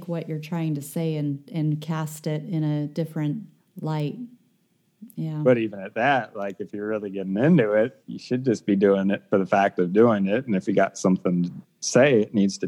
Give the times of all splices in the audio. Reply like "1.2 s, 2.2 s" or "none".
3.6 s, 8.0 s